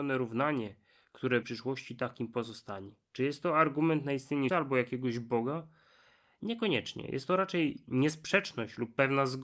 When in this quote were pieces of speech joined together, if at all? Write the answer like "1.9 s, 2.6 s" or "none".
1.4 s, 3.1 s, 4.5 s